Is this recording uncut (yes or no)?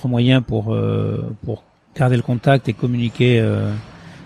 yes